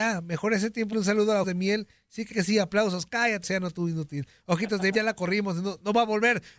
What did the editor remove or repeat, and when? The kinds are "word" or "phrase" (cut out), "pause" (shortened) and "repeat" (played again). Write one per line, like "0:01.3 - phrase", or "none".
0:00.9 - word
0:01.4 - word
0:02.3 - word
0:03.4 - word
0:04.9 - word